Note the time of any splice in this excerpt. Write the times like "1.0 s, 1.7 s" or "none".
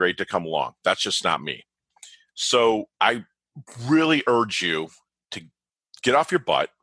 2.9 s